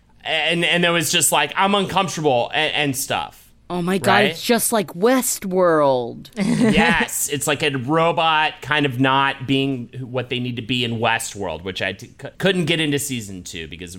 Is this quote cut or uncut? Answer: cut